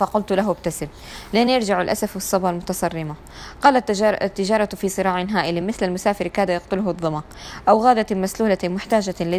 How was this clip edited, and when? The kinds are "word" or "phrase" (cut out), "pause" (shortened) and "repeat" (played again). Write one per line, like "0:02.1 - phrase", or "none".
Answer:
none